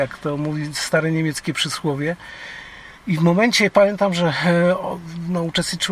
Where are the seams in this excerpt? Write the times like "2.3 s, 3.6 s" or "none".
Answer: 3.0 s